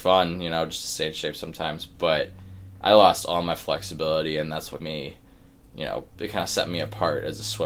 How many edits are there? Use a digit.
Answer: 2